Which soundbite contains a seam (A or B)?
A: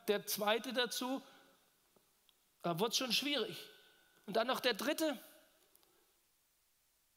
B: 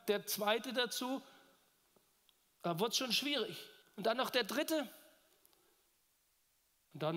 B